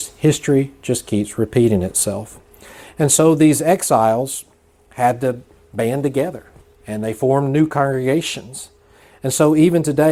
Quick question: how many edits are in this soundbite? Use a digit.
0